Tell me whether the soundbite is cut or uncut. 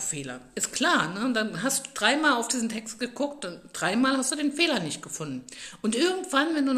uncut